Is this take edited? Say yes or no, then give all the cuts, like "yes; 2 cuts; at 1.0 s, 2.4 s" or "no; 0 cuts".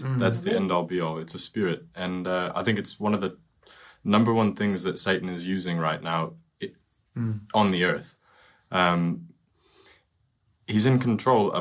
no; 0 cuts